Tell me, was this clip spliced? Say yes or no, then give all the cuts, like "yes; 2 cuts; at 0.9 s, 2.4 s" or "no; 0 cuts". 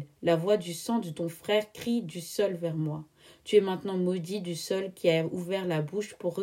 no; 0 cuts